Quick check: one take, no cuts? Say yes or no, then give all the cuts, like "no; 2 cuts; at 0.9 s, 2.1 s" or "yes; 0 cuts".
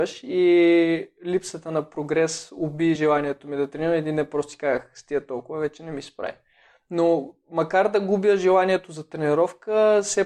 yes; 0 cuts